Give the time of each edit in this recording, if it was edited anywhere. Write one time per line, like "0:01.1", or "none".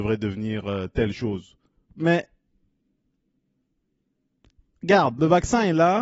0:01.7